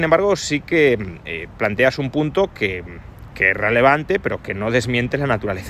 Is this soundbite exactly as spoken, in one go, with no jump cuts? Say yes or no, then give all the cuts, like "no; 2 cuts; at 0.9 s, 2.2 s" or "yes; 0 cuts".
yes; 0 cuts